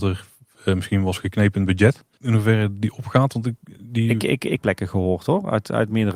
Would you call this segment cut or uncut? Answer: cut